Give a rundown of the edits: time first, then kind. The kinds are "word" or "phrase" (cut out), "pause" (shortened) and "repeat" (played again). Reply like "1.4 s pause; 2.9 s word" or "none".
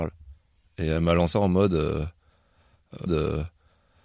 1.3 s word; 3.1 s repeat